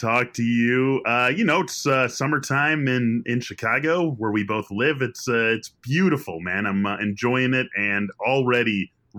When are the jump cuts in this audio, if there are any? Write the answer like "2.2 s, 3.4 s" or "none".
none